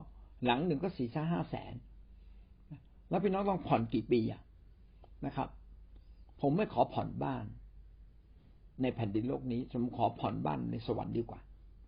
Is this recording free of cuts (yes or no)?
yes